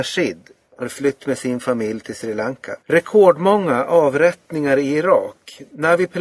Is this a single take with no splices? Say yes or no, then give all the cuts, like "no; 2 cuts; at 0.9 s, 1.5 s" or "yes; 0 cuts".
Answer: no; 1 cut; at 2.8 s